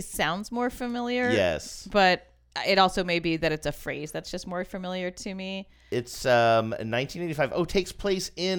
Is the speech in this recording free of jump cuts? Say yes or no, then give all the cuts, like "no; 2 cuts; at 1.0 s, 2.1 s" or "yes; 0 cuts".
yes; 0 cuts